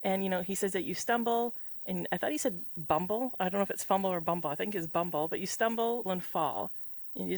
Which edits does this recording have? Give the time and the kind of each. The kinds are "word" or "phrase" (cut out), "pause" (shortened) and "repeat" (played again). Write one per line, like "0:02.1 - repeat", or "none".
0:06.1 - word